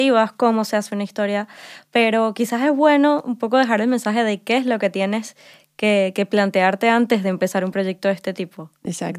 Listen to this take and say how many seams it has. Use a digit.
0